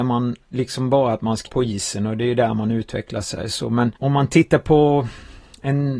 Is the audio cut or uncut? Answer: cut